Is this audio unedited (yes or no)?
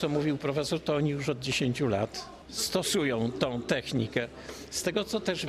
yes